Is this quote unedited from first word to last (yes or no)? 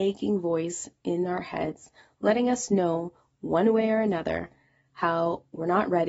yes